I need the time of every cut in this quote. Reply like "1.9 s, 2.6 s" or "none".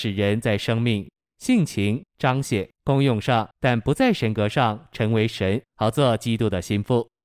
2.1 s, 2.7 s, 3.5 s, 5.7 s